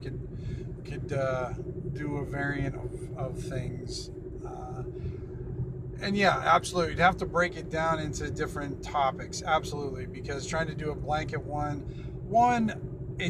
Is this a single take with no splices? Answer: yes; 0 cuts

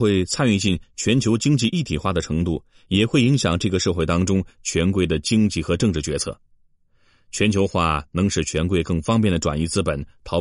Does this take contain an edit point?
no; 0 cuts

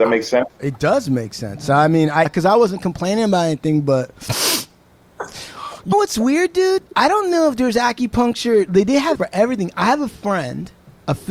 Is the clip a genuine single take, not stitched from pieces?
no; 3 cuts; at 2.2 s, 5.9 s, 9.1 s

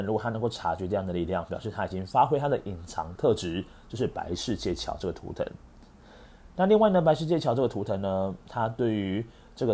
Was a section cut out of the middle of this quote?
no; 0 cuts

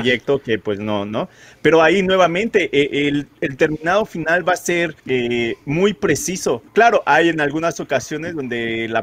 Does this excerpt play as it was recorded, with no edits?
no; 2 cuts; at 5.0 s, 6.7 s

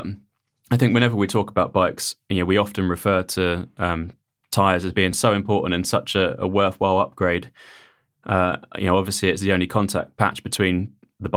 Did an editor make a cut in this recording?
no; 0 cuts

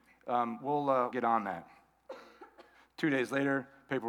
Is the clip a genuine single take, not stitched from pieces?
no; 2 cuts; at 1.1 s, 2.7 s

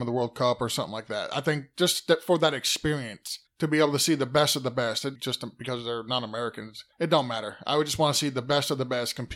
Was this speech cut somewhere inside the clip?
yes; 3 cuts; at 3.5 s, 5.2 s, 6.9 s

